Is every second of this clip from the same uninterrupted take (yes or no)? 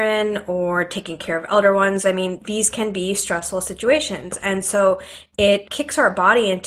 yes